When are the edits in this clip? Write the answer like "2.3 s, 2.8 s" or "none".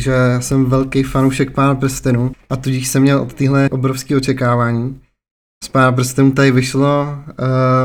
3.7 s